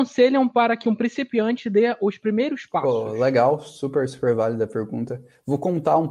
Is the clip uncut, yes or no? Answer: yes